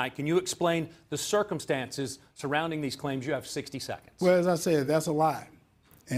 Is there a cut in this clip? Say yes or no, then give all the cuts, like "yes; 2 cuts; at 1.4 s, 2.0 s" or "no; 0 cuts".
no; 0 cuts